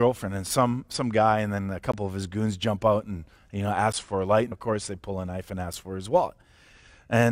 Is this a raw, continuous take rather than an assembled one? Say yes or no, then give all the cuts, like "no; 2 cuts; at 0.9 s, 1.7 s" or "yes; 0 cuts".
no; 1 cut; at 4.5 s